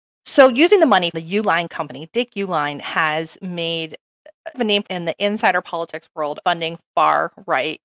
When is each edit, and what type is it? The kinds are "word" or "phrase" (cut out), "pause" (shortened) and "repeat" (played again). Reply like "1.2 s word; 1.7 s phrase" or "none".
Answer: 1.1 s word; 4.5 s word; 4.9 s word; 6.4 s word